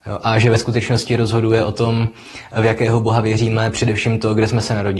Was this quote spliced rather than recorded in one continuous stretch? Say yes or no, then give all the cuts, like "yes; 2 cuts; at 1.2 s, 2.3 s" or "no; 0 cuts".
no; 0 cuts